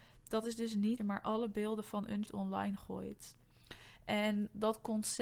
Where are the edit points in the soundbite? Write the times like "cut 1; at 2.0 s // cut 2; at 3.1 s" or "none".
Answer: cut 1; at 1.0 s // cut 2; at 2.3 s